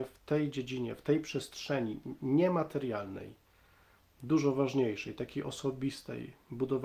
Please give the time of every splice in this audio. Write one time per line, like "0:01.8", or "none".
none